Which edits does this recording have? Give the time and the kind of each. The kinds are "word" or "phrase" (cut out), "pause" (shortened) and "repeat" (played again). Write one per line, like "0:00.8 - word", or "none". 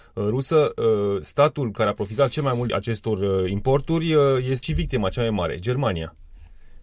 0:02.7 - phrase
0:04.6 - word

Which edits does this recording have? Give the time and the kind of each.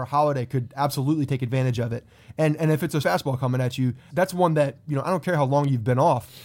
0:03.0 - word
0:04.1 - word

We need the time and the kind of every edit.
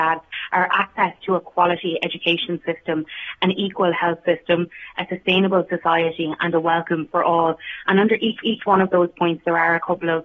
0:08.4 - repeat

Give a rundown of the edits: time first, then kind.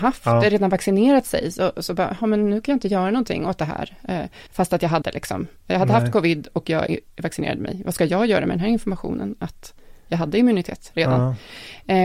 0:04.5 - pause
0:05.0 - word
0:05.6 - pause

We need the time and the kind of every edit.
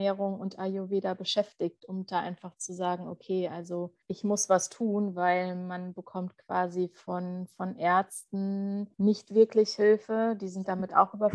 0:04.0 - pause
0:08.9 - pause

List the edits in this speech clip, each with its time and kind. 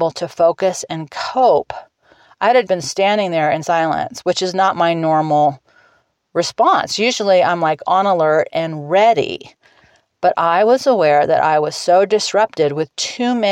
0:02.7 - word
0:03.6 - word

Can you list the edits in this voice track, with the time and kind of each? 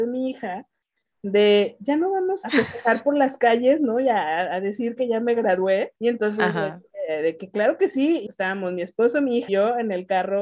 0:02.4 - phrase
0:06.0 - pause
0:08.3 - word
0:09.5 - word

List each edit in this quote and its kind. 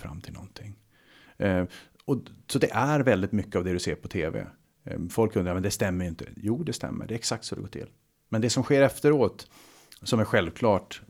none

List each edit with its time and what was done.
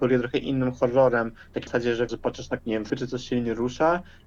0:01.7 - word
0:02.1 - word
0:02.6 - word
0:02.9 - word

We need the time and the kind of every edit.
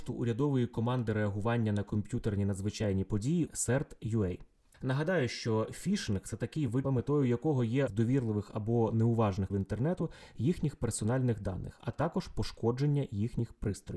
0:03.5 - word
0:06.8 - word
0:07.9 - word
0:09.5 - word

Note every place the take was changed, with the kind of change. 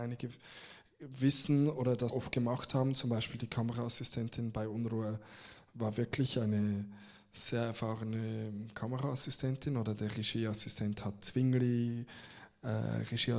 0:02.1 - word
0:11.2 - word

